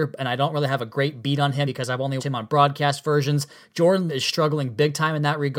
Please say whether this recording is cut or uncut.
cut